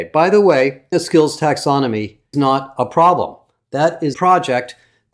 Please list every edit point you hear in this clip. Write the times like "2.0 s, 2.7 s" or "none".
0.9 s, 2.3 s, 4.1 s